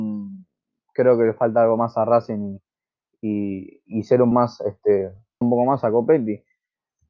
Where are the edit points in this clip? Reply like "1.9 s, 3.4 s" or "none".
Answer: 3.9 s, 4.3 s, 5.4 s